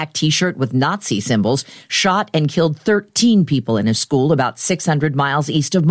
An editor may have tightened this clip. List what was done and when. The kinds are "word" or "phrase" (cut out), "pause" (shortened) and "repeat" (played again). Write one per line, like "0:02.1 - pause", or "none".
none